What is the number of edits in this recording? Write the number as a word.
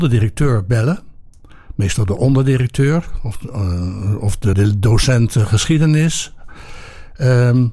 one